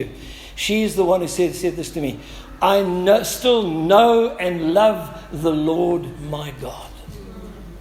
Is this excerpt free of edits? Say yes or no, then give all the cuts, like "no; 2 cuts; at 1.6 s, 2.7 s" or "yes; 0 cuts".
yes; 0 cuts